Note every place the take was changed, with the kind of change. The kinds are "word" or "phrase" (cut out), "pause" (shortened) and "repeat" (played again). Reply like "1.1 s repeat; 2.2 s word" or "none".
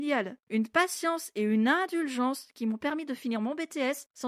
none

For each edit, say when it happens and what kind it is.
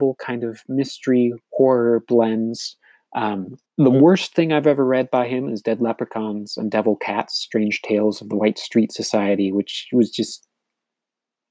1.4 s pause; 3.7 s pause

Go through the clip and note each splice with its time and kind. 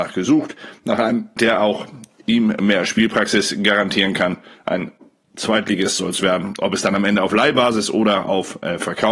1.4 s word

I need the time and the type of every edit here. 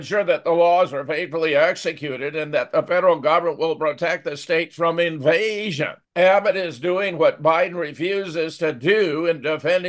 6.0 s pause

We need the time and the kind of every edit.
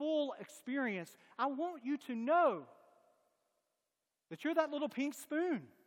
none

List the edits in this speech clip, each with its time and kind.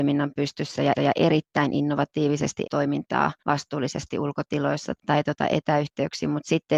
0.9 s repeat; 2.6 s phrase; 3.4 s pause; 5.0 s word

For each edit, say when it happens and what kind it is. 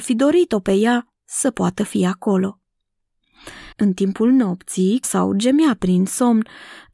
3.7 s pause; 5.0 s phrase

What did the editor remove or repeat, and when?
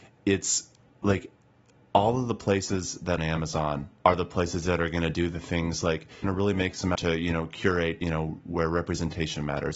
3.2 s word; 4.0 s pause; 6.2 s phrase; 6.9 s word; 8.0 s phrase

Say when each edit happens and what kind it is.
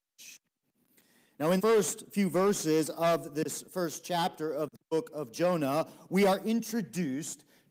1.6 s word

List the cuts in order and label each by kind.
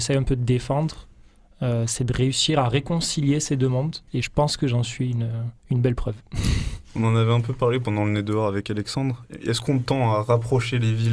4.1 s pause; 5.6 s pause

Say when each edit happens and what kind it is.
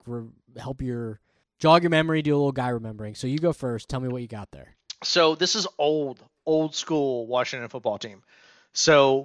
1.4 s pause

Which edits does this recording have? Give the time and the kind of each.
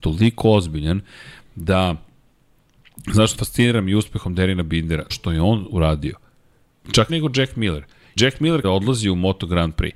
3.3 s word; 5.1 s word; 7.1 s word; 8.2 s word; 8.6 s word

